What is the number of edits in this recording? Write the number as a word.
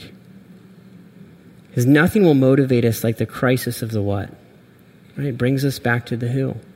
zero